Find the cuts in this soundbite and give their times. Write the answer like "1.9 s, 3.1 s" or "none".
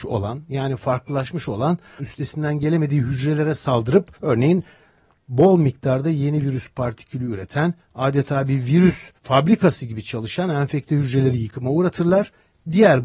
2.0 s, 4.2 s, 9.2 s